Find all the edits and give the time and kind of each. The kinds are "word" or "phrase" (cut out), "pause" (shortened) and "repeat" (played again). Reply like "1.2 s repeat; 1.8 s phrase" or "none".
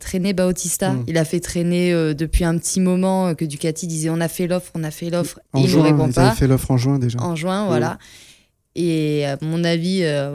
none